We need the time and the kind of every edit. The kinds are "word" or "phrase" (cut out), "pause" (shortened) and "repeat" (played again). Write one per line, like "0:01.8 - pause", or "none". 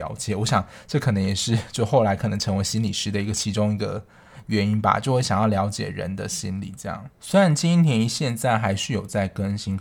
0:07.1 - pause